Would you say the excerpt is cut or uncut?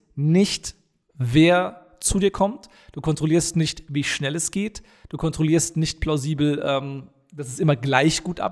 uncut